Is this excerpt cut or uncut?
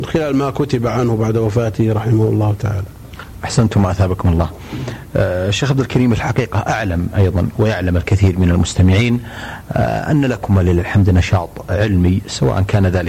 uncut